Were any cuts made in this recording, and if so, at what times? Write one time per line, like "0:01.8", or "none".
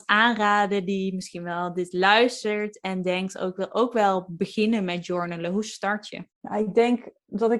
0:06.3